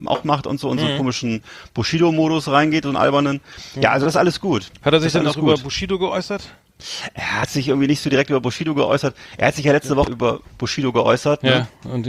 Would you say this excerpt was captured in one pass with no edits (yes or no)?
no